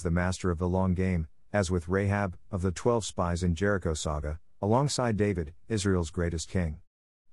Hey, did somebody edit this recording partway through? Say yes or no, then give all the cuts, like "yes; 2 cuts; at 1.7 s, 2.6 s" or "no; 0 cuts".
no; 0 cuts